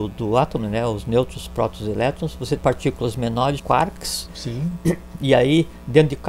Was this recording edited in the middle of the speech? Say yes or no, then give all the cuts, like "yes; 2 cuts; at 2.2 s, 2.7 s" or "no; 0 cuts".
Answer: yes; 3 cuts; at 2.6 s, 3.6 s, 4.3 s